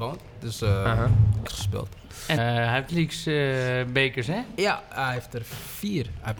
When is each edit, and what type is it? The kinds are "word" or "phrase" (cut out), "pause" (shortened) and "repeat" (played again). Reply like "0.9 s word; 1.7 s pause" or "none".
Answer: 1.5 s phrase; 2.4 s word; 2.9 s phrase